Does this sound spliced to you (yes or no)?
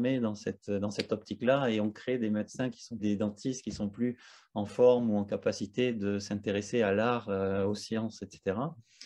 yes